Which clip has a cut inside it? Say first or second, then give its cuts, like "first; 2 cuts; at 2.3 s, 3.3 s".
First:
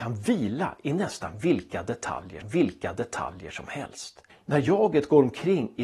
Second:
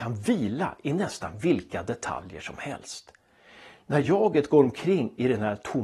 first; 2 cuts; at 2.4 s, 4.3 s